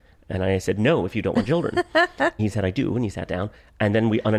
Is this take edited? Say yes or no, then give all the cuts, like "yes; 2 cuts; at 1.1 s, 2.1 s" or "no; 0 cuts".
yes; 1 cut; at 2.4 s